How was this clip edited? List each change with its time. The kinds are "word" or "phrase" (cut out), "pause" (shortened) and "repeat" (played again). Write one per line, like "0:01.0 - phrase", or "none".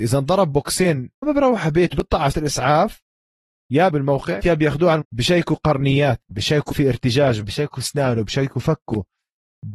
0:01.2 - word
0:01.9 - word
0:02.3 - word
0:03.9 - word
0:04.4 - word
0:05.0 - word
0:06.2 - word
0:06.7 - word
0:07.4 - word